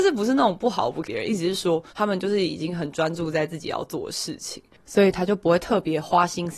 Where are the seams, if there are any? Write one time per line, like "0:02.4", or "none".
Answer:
0:01.0
0:01.9